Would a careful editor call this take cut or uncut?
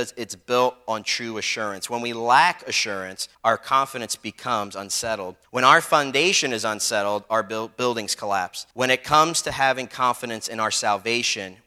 cut